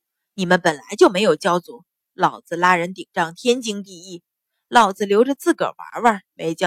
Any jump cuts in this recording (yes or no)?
no